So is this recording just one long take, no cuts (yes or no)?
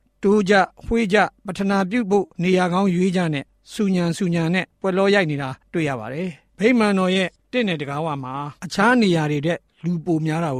no